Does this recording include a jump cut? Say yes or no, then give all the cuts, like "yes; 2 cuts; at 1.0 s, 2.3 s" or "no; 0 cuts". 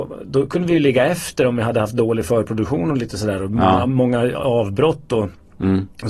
no; 0 cuts